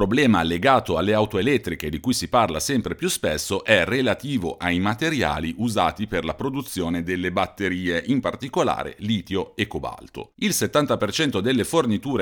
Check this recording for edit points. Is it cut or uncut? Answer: uncut